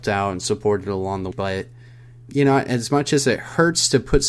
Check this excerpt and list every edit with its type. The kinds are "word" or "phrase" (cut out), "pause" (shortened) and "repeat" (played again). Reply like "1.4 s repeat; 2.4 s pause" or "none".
1.3 s word; 2.3 s word